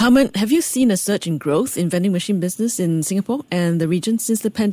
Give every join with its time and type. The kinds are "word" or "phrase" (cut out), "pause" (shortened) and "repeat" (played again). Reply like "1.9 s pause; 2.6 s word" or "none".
none